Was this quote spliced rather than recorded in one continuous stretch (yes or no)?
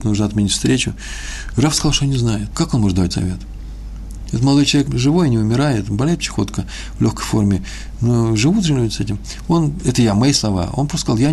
yes